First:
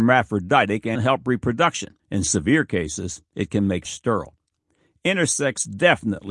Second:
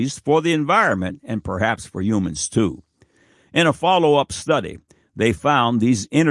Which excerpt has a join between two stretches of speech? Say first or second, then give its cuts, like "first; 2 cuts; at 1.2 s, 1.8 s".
first; 3 cuts; at 1.0 s, 2.0 s, 3.8 s